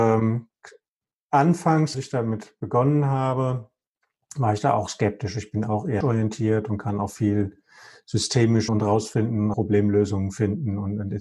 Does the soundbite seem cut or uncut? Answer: cut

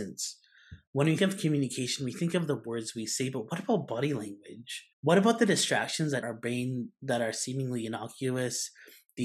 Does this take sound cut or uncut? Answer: cut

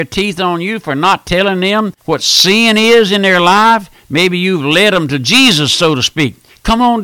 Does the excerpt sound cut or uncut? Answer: cut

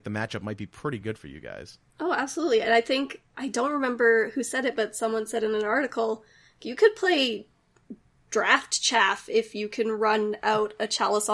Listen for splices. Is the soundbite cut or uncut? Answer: uncut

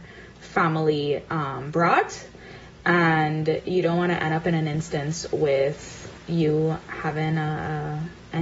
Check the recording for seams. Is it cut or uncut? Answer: uncut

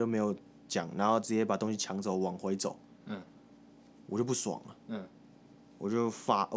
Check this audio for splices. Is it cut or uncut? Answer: uncut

